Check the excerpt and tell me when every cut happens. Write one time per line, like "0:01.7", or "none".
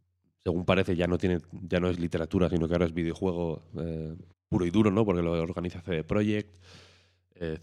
0:04.3